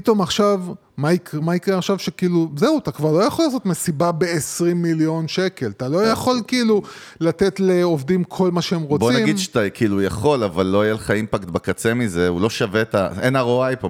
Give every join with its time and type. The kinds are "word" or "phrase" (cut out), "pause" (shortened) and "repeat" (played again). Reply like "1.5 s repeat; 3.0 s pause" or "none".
1.4 s word